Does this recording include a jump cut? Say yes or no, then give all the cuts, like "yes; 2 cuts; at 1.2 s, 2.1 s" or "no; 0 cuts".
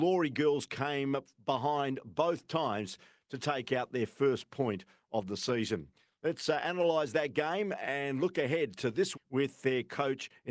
yes; 1 cut; at 9.1 s